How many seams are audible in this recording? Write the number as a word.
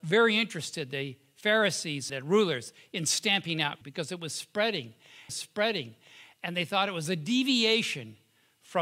three